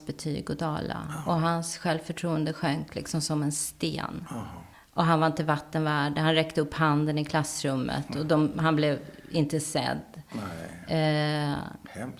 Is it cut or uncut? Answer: cut